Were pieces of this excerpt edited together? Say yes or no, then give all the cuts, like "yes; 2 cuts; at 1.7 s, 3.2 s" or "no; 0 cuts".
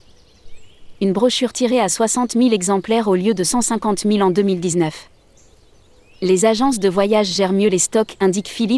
no; 0 cuts